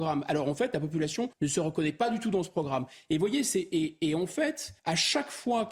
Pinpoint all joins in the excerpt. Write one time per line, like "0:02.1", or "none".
0:01.3
0:04.8